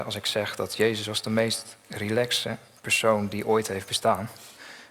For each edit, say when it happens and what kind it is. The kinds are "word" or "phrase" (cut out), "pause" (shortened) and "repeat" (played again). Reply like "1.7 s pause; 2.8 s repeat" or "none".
none